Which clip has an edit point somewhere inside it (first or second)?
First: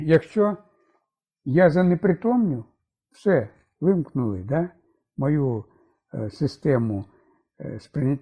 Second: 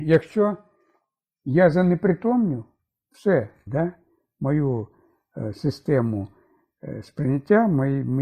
second